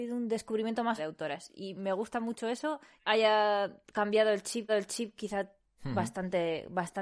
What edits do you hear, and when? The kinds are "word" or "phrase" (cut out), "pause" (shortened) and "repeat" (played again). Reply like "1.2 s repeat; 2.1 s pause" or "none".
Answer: 1.0 s word; 3.0 s phrase; 4.7 s repeat